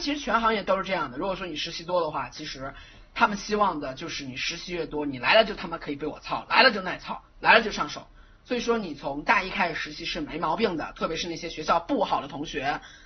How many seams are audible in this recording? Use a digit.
1